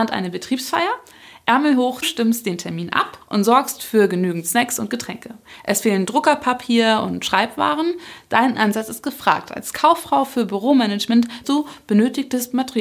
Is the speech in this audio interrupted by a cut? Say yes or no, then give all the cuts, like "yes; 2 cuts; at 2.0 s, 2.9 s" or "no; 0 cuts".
yes; 3 cuts; at 2.0 s, 3.2 s, 11.4 s